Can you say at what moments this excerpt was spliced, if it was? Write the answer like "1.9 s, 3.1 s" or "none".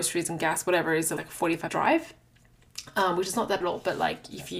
1.2 s, 1.7 s, 3.6 s